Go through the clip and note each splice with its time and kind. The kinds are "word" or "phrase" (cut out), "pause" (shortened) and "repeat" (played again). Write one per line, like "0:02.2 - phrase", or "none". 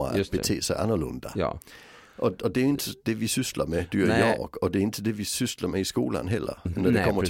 none